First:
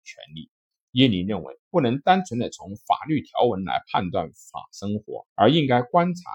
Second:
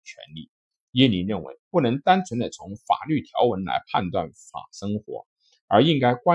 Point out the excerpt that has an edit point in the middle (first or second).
first